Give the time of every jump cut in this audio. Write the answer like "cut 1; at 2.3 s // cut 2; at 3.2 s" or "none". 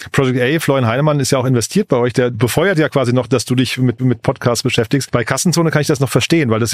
cut 1; at 4.0 s